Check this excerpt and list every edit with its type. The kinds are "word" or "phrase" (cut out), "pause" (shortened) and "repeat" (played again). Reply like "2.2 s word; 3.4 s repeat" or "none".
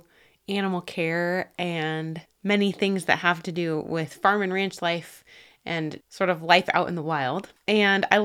6.0 s word